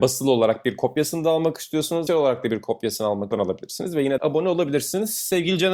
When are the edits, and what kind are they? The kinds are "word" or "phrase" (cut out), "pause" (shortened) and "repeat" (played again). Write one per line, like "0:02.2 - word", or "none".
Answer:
0:02.1 - word
0:03.3 - phrase
0:04.2 - word

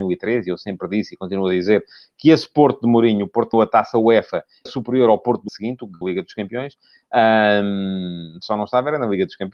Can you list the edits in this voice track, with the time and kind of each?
0:03.5 - word
0:04.7 - word
0:05.5 - word
0:06.0 - word

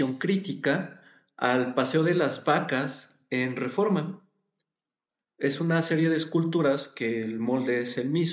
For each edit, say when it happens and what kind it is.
none

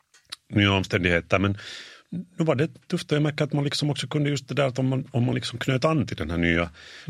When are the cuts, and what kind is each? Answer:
none

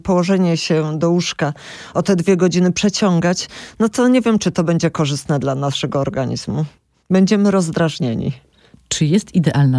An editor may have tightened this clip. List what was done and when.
0:06.8 - pause

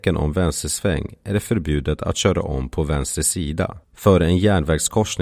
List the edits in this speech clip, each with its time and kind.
0:03.8 - pause

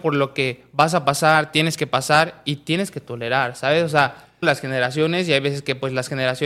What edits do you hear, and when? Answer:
0:04.4 - phrase

